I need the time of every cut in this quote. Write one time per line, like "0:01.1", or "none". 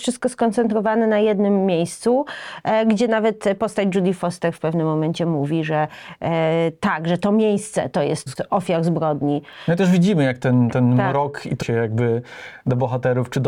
0:08.3
0:11.6